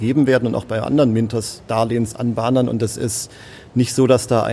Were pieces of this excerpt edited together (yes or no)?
no